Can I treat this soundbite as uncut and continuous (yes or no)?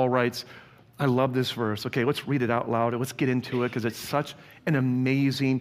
yes